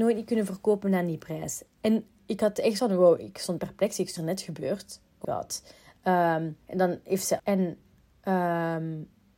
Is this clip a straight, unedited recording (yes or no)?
no